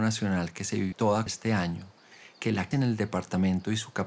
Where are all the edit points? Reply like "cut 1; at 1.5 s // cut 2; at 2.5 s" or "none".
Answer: cut 1; at 0.9 s // cut 2; at 1.3 s // cut 3; at 2.7 s